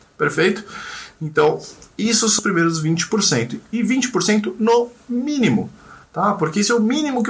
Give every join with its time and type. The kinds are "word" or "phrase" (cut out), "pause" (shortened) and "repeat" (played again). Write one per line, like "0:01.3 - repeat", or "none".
0:02.4 - word